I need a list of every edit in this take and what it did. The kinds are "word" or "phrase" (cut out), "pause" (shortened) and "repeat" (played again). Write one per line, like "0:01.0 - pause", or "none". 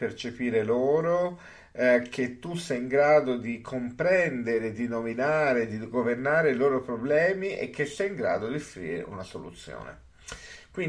none